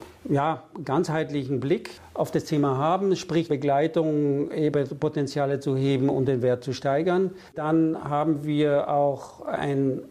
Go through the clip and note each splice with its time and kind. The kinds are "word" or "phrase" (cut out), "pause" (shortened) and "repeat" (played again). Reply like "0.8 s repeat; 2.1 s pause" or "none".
3.5 s word; 4.7 s word; 7.5 s pause